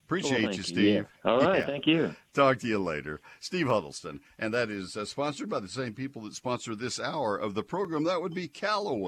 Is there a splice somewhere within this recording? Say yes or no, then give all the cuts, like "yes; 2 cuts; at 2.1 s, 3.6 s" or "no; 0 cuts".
no; 0 cuts